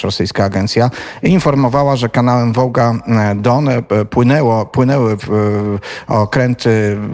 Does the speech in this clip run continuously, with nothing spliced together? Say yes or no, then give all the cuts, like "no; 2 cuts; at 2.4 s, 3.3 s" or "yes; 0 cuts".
yes; 0 cuts